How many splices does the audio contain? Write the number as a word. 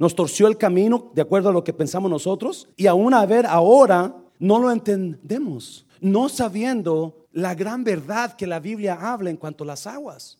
four